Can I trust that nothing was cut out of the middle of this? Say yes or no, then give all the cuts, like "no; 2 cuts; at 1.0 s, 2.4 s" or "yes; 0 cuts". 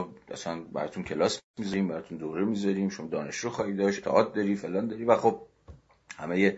no; 1 cut; at 4.0 s